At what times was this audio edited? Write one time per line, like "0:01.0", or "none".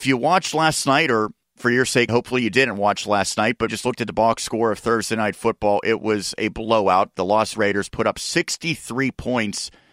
0:01.4
0:02.1
0:03.7
0:07.5